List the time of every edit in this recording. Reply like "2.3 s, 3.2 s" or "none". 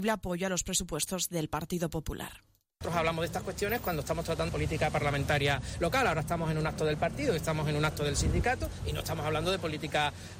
4.5 s